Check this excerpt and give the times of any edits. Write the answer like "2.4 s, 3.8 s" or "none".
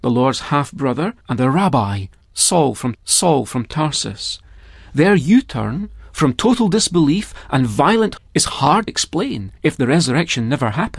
1.2 s, 2.9 s, 8.2 s, 8.9 s, 9.6 s